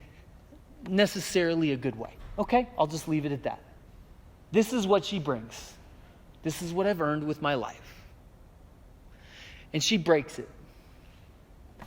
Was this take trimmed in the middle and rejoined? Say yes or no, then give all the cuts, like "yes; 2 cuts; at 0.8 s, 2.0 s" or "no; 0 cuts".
no; 0 cuts